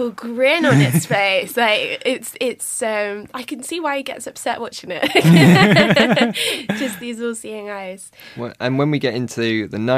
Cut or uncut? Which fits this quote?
uncut